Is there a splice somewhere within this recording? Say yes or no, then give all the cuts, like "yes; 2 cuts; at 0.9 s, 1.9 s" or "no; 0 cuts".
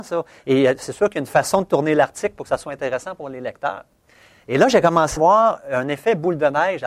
yes; 1 cut; at 5.2 s